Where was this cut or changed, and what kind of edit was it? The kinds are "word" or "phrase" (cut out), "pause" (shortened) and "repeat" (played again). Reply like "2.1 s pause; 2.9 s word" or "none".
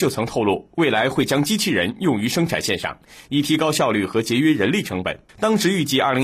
5.3 s pause